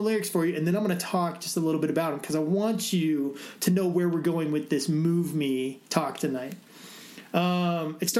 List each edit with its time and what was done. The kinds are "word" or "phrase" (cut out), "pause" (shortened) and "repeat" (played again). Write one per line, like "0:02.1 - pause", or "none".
0:05.8 - pause

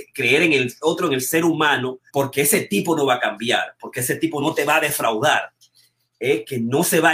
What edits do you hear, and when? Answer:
0:02.1 - pause

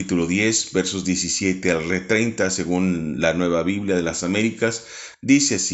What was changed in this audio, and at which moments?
none

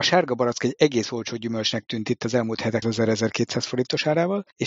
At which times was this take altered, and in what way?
0:02.8 - phrase

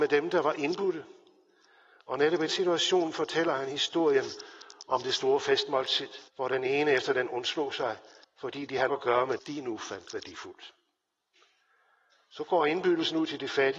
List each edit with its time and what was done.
0:02.5 - word
0:06.3 - pause
0:07.3 - word
0:08.2 - pause
0:08.9 - word
0:09.4 - word

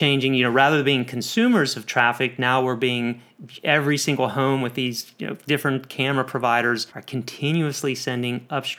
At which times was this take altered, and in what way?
0:06.9 - pause

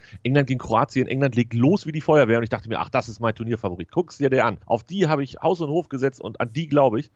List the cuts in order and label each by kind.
0:04.6 - pause

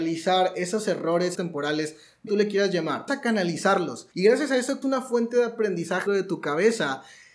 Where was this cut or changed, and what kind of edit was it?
0:01.3 - phrase
0:02.3 - phrase
0:03.1 - word
0:04.1 - pause
0:04.8 - word
0:06.1 - word

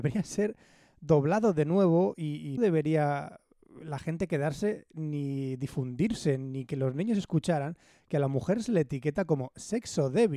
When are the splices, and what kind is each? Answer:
0:02.6 - word

